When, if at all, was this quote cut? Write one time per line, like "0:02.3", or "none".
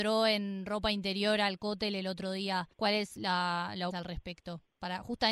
0:02.7
0:03.9